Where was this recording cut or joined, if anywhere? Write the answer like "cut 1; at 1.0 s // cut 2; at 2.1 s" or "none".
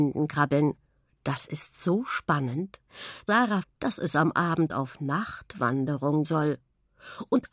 cut 1; at 3.3 s // cut 2; at 3.6 s // cut 3; at 6.2 s